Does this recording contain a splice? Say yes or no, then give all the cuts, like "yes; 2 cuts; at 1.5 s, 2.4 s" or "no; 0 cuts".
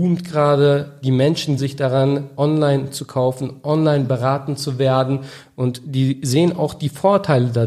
yes; 1 cut; at 1.6 s